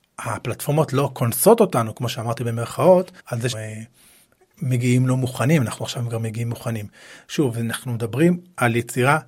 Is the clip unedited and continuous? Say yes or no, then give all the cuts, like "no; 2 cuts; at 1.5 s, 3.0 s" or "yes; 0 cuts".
no; 2 cuts; at 3.2 s, 3.5 s